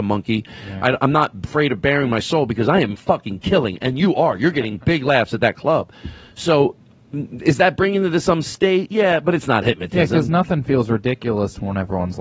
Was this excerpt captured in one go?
yes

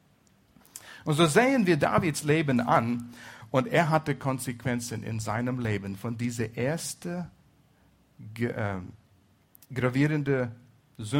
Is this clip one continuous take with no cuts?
yes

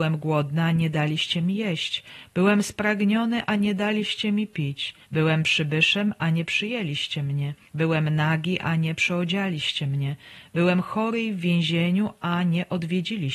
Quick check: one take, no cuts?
no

